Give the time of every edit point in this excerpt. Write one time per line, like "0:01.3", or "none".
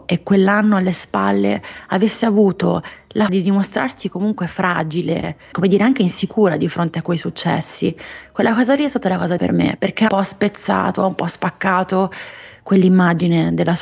0:03.3
0:05.5
0:09.4
0:10.1